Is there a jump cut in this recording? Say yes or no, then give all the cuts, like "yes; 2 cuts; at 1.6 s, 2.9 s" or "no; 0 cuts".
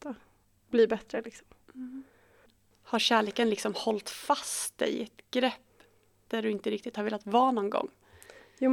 no; 0 cuts